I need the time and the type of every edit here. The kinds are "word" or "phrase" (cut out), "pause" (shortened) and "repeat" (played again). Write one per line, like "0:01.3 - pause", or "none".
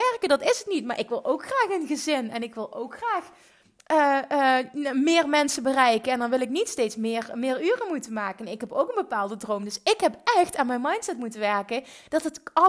none